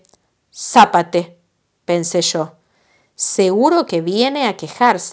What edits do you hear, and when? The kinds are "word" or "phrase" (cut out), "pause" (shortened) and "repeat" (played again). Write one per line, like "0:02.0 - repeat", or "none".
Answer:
none